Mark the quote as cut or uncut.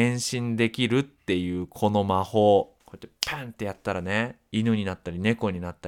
cut